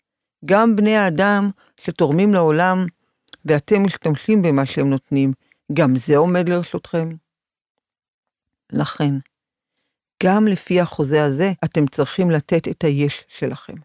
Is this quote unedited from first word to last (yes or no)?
no